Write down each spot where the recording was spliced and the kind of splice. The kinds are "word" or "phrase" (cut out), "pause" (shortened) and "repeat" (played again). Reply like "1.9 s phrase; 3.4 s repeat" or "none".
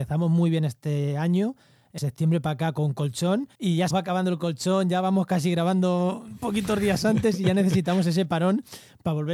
2.0 s word; 3.5 s pause; 3.9 s word